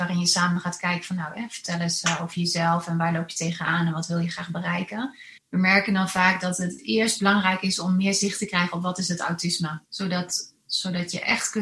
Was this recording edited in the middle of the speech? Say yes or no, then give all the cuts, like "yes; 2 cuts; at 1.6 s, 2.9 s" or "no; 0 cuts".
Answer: yes; 2 cuts; at 5.4 s, 9.9 s